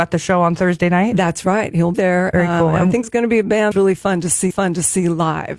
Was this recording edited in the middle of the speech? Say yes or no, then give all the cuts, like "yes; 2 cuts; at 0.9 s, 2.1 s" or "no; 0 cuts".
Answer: yes; 4 cuts; at 1.9 s, 3.0 s, 3.7 s, 4.5 s